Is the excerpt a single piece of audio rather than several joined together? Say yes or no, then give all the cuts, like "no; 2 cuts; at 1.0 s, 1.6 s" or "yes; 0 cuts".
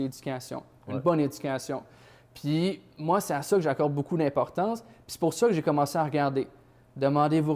yes; 0 cuts